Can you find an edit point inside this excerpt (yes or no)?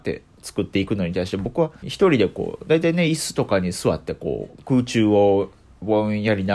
yes